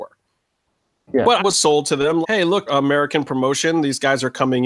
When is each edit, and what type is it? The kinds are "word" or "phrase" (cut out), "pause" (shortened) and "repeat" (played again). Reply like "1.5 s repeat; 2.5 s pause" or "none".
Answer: 1.4 s phrase; 2.2 s word; 2.7 s phrase